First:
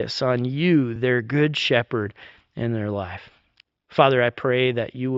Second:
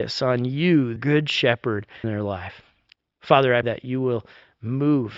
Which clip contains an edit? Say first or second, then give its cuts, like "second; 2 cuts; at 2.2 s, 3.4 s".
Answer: second; 3 cuts; at 1.0 s, 2.0 s, 3.6 s